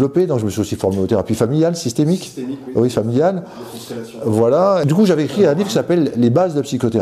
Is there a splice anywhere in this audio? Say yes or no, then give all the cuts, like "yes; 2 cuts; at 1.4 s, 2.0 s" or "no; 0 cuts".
no; 0 cuts